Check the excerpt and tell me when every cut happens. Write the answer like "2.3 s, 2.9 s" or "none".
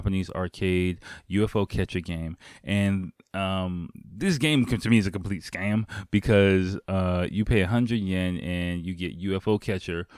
none

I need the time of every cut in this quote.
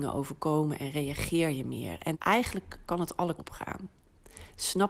2.1 s, 3.4 s

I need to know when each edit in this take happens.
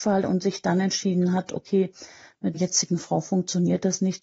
2.5 s

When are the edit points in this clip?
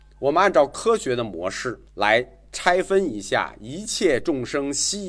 1.9 s

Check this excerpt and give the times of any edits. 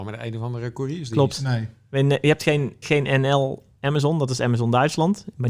2.8 s

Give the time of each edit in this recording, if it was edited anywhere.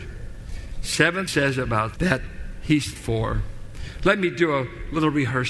1.3 s, 2.0 s, 3.0 s

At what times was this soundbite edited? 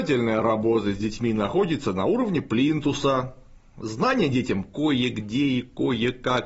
none

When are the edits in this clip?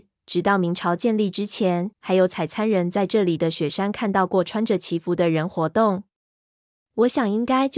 1.9 s

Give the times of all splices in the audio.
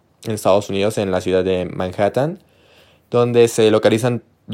none

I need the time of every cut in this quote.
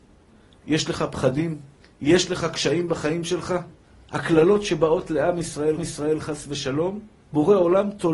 1.8 s, 3.8 s, 5.8 s, 7.2 s

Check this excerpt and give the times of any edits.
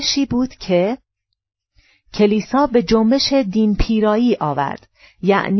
none

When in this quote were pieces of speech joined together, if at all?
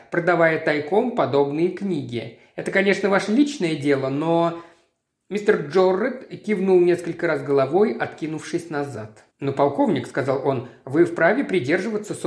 9.3 s

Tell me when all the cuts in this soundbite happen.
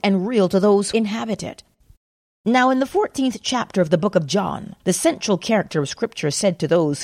0.9 s, 1.9 s, 4.8 s

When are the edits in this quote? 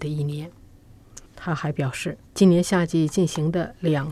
1.3 s, 2.2 s

